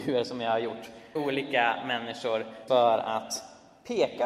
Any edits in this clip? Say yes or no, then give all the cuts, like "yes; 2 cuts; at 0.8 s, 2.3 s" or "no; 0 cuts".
yes; 2 cuts; at 1.2 s, 2.7 s